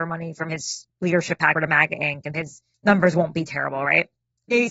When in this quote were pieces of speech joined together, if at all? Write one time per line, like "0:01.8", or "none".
0:00.9
0:01.5
0:02.3
0:02.7